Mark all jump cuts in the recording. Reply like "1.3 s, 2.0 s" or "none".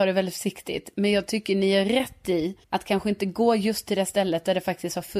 2.6 s